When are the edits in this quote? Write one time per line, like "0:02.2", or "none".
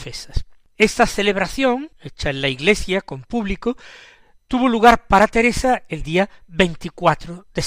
0:01.9